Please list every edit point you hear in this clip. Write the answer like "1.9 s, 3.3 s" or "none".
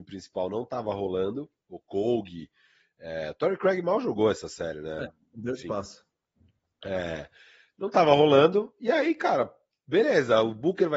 none